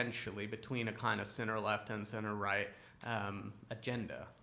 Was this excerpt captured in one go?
yes; 0 cuts

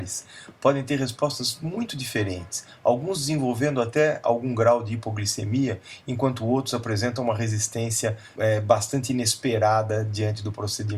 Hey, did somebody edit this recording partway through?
yes; 1 cut; at 8.4 s

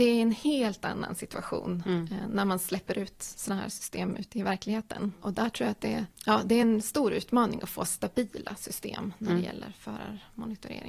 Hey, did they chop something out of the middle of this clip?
no; 0 cuts

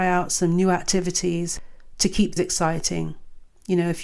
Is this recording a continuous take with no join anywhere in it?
no; 1 cut; at 2.4 s

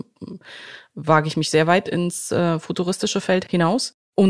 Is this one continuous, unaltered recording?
yes; 0 cuts

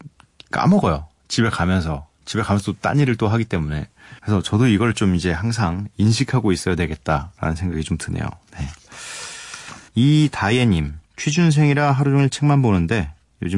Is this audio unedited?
no; 3 cuts; at 4.2 s, 9.9 s, 11.0 s

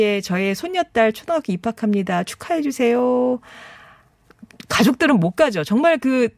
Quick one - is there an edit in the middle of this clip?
no; 0 cuts

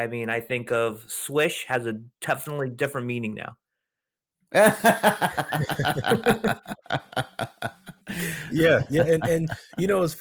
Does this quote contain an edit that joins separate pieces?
yes; 1 cut; at 8.0 s

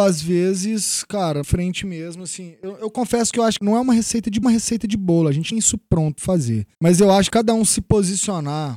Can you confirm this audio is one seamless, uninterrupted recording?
no; 8 cuts; at 1.4 s, 2.8 s, 3.6 s, 4.4 s, 5.5 s, 6.2 s, 6.7 s, 7.3 s

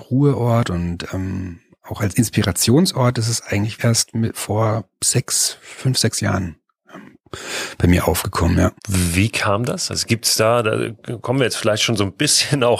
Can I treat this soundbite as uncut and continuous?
no; 2 cuts; at 3.8 s, 8.8 s

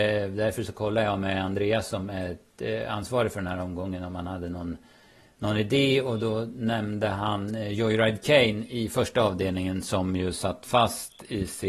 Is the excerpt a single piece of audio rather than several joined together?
yes; 0 cuts

